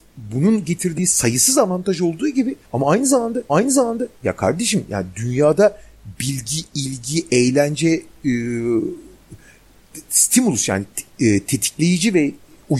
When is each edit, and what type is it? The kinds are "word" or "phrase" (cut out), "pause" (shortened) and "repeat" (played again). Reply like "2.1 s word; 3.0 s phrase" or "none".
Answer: 2.6 s pause; 3.5 s repeat